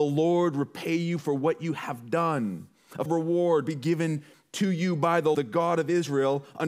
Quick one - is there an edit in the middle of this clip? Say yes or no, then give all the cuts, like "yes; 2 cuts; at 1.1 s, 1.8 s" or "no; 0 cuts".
yes; 2 cuts; at 3.1 s, 5.3 s